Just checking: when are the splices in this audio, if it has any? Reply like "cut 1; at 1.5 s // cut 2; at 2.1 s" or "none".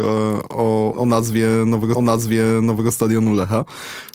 cut 1; at 0.9 s // cut 2; at 1.9 s